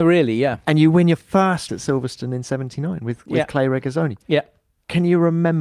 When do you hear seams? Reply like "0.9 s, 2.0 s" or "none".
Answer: 1.7 s